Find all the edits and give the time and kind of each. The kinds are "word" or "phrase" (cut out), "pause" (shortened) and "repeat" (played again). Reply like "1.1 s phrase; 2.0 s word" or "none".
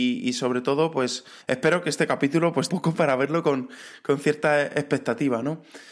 1.4 s pause; 2.7 s phrase